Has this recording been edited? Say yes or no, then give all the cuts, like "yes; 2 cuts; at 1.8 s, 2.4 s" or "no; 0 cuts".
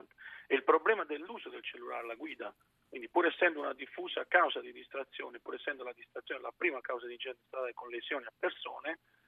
no; 0 cuts